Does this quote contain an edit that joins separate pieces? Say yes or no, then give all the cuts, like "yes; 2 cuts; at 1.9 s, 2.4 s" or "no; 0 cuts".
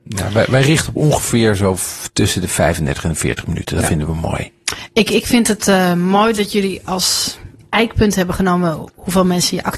no; 0 cuts